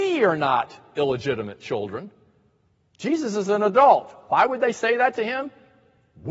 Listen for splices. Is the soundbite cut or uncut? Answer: uncut